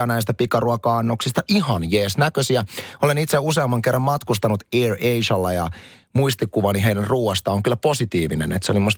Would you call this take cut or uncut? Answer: uncut